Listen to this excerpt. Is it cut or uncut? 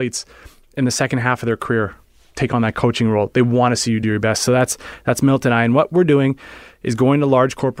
uncut